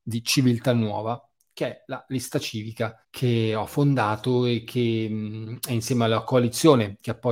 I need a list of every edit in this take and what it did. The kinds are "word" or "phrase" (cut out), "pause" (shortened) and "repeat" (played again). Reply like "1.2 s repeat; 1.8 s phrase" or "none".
3.0 s pause